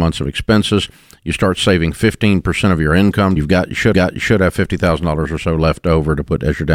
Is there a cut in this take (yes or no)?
yes